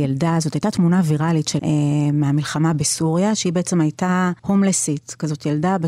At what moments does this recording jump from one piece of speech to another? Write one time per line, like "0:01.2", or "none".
0:01.6
0:04.4